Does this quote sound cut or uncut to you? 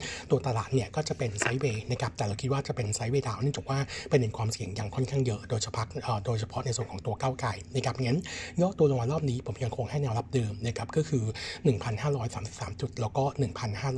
uncut